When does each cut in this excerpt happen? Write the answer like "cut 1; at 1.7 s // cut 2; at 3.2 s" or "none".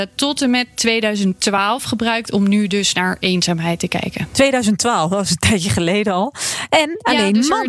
none